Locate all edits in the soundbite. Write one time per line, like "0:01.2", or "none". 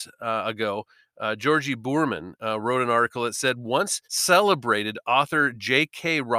0:04.0